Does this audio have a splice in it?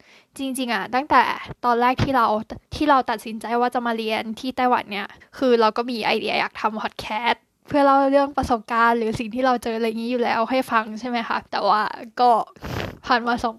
yes; 3 cuts; at 2.7 s, 5.2 s, 11.5 s

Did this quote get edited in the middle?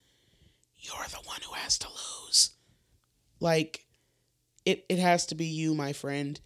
no; 0 cuts

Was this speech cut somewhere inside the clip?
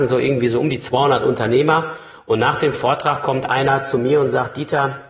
no; 0 cuts

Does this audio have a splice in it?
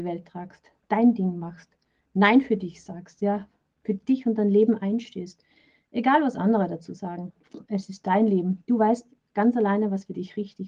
no; 0 cuts

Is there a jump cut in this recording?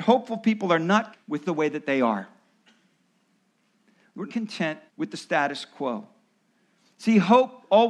yes; 4 cuts; at 1.1 s, 1.4 s, 4.3 s, 4.9 s

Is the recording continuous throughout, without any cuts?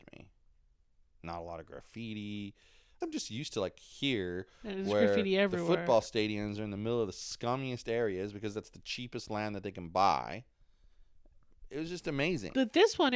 no; 1 cut; at 3.0 s

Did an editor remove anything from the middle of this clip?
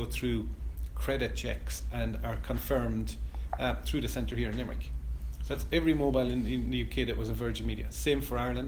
no; 0 cuts

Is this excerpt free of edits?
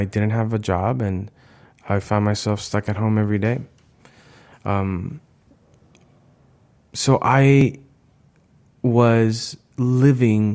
yes; 0 cuts

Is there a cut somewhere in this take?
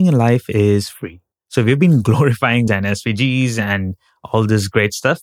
yes; 2 cuts; at 1.3 s, 2.7 s

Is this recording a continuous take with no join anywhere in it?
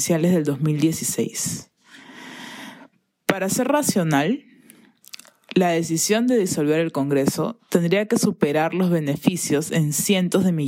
yes; 0 cuts

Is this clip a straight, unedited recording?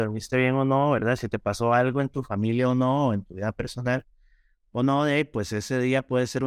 yes; 0 cuts

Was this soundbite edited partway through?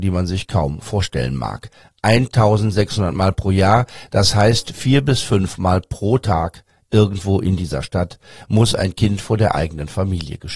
no; 0 cuts

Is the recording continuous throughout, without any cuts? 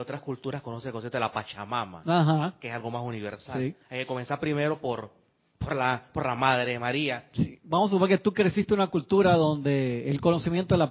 yes; 0 cuts

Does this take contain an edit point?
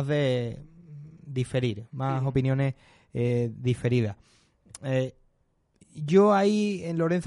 no; 0 cuts

